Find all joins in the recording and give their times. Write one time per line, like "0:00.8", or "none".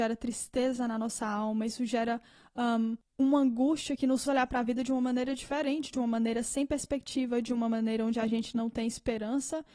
0:03.0
0:04.3